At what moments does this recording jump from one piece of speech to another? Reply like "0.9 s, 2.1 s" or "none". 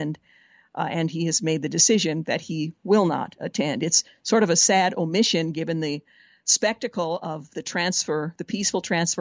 none